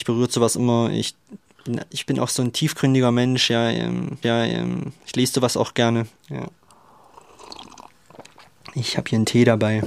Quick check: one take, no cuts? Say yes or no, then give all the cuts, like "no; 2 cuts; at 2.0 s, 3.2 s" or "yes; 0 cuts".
no; 2 cuts; at 4.2 s, 6.2 s